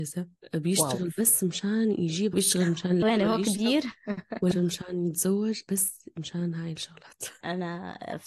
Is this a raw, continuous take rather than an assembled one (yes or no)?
no